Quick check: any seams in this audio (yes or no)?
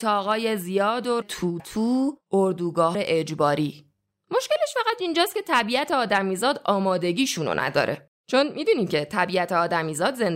yes